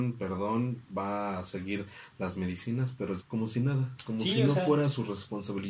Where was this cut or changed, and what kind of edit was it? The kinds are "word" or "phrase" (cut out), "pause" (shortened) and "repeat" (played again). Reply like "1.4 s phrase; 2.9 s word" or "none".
3.2 s word